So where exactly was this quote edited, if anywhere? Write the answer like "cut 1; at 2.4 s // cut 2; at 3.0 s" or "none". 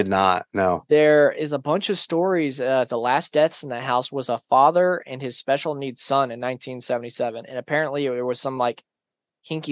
none